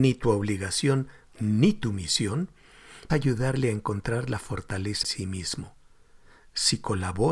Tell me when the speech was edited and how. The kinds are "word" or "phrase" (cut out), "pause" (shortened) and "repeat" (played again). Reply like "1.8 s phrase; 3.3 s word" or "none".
3.1 s word; 5.0 s word

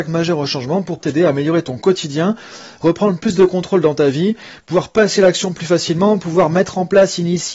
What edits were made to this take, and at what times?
1.0 s word

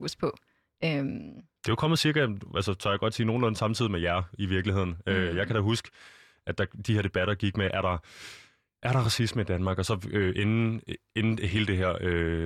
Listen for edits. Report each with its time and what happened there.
none

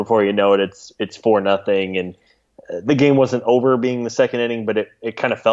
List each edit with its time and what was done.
none

